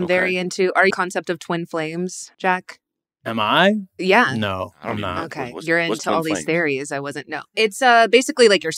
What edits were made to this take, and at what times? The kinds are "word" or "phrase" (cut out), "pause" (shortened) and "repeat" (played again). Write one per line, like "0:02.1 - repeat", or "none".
0:00.9 - phrase
0:02.3 - pause